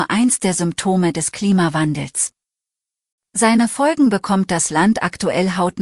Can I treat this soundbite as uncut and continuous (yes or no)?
yes